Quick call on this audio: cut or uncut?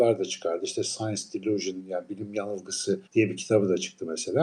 cut